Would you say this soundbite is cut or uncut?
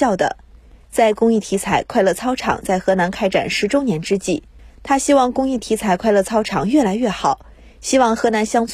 uncut